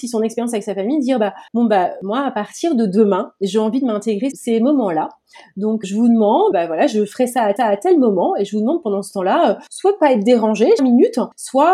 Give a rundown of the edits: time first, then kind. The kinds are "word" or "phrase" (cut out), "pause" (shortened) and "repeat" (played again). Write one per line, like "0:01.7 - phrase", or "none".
0:01.5 - pause
0:04.3 - word
0:05.8 - word
0:06.5 - word
0:07.6 - repeat
0:09.7 - pause
0:10.8 - phrase